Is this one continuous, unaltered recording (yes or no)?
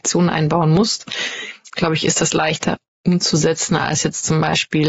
yes